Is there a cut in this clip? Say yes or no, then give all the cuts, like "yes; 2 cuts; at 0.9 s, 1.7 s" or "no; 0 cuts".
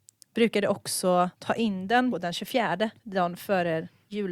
yes; 3 cuts; at 1.3 s, 2.1 s, 3.0 s